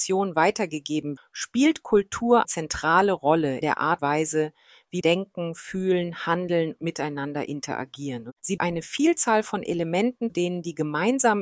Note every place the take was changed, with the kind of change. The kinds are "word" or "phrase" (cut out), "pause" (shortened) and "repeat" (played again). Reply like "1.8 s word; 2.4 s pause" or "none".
1.2 s word; 2.4 s word; 3.6 s word; 4.0 s word; 5.0 s word; 6.8 s word; 8.6 s word; 10.3 s word